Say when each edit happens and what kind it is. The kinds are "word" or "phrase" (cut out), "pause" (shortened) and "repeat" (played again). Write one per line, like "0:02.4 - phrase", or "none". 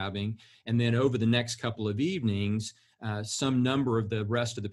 none